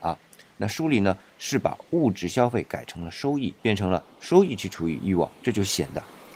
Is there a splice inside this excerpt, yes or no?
yes